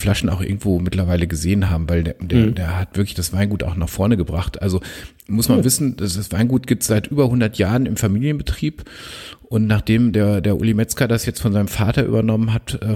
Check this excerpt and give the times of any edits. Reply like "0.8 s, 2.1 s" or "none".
none